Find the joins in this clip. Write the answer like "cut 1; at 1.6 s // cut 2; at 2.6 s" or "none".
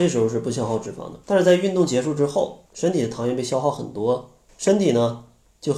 cut 1; at 1.2 s // cut 2; at 2.7 s // cut 3; at 4.5 s